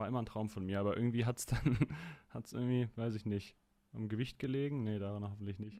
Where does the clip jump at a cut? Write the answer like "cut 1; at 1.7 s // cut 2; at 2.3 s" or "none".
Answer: none